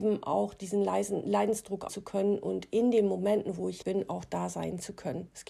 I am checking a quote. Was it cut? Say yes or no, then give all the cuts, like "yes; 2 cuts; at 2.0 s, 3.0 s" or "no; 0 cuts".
yes; 2 cuts; at 1.9 s, 3.8 s